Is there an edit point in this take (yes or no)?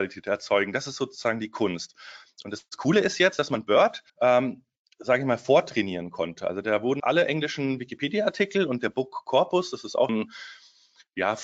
yes